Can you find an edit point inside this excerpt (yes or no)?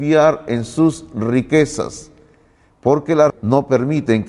yes